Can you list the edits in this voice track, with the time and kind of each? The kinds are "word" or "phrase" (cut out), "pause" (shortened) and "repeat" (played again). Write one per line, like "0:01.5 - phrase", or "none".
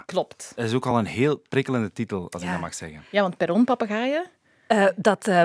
none